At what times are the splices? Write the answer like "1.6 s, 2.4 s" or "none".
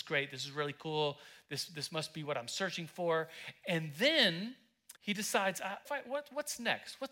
5.0 s, 5.9 s